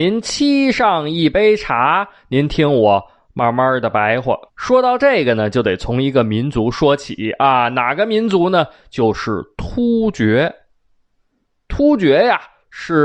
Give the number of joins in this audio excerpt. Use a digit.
1